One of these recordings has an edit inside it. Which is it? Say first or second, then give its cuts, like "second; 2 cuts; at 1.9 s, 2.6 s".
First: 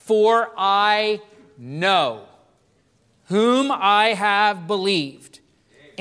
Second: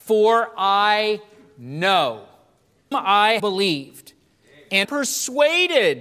second; 3 cuts; at 2.9 s, 3.4 s, 4.8 s